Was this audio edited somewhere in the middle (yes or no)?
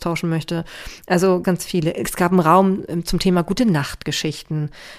yes